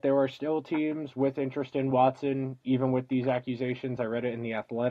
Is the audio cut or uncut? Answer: uncut